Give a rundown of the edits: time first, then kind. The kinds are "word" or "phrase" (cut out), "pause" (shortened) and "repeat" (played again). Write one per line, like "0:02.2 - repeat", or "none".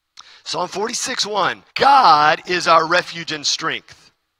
0:01.7 - pause